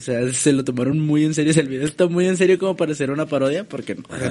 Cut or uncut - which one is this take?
uncut